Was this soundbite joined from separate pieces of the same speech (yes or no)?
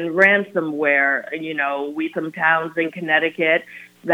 yes